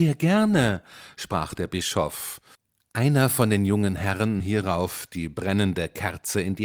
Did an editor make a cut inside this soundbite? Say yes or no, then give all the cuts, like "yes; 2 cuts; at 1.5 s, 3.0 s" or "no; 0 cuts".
yes; 2 cuts; at 2.5 s, 4.4 s